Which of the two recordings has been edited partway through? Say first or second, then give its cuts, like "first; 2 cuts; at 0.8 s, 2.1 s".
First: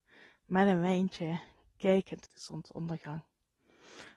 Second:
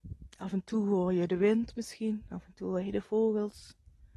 first; 1 cut; at 2.2 s